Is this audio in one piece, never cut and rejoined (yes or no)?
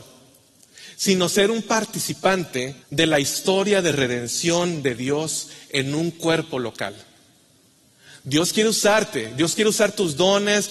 no